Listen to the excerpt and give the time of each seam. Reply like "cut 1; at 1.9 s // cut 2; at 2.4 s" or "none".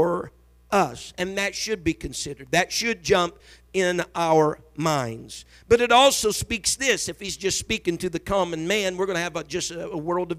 none